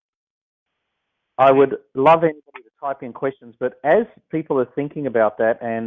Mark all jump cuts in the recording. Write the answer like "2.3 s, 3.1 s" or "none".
none